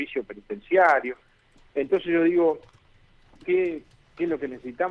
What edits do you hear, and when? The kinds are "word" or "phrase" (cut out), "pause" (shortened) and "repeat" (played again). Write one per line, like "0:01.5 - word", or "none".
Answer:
0:03.4 - word